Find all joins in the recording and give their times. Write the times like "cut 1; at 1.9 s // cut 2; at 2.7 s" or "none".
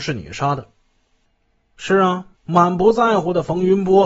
cut 1; at 2.3 s

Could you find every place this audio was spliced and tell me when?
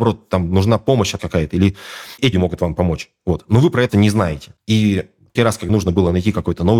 cut 1; at 1.2 s // cut 2; at 2.3 s // cut 3; at 3.9 s // cut 4; at 5.4 s // cut 5; at 5.7 s

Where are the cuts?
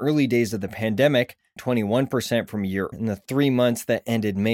cut 1; at 1.6 s // cut 2; at 2.9 s

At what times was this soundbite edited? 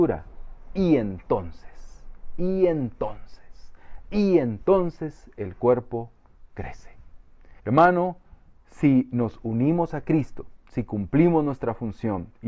cut 1; at 7.6 s // cut 2; at 10.6 s

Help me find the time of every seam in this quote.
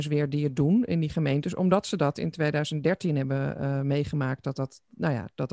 none

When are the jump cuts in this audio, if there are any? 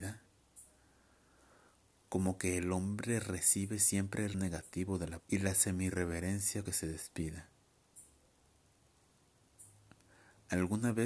cut 1; at 4.3 s // cut 2; at 5.2 s // cut 3; at 6.7 s

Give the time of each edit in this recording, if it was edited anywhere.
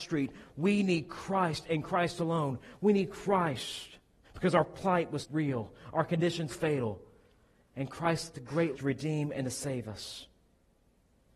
cut 1; at 4.2 s // cut 2; at 5.2 s // cut 3; at 6.5 s // cut 4; at 8.3 s // cut 5; at 8.7 s

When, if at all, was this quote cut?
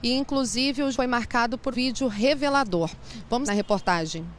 cut 1; at 0.9 s // cut 2; at 1.7 s // cut 3; at 3.5 s

